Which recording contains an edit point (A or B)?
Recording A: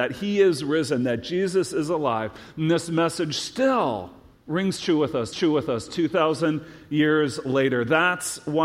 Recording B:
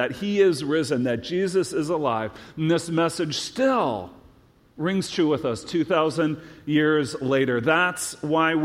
A